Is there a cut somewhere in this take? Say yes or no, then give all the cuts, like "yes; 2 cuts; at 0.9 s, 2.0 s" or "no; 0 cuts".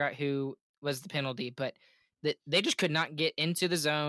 no; 0 cuts